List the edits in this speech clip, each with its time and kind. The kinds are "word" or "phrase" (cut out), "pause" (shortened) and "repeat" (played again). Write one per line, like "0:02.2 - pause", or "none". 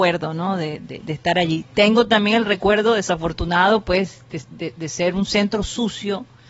0:01.7 - pause